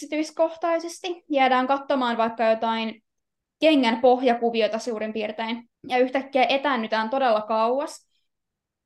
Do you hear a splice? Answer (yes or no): yes